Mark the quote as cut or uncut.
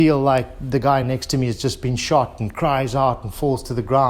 uncut